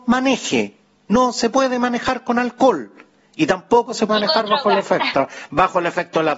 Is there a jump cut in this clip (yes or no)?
yes